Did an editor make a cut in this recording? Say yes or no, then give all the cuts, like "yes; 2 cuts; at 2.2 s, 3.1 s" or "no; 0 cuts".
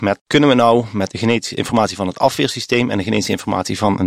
no; 0 cuts